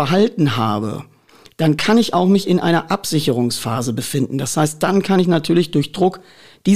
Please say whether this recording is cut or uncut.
uncut